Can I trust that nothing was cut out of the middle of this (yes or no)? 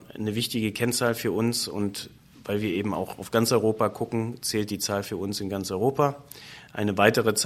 yes